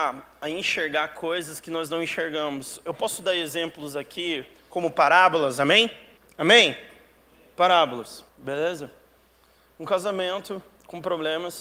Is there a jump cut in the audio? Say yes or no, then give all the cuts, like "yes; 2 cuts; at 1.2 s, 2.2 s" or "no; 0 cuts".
yes; 2 cuts; at 6.2 s, 8.3 s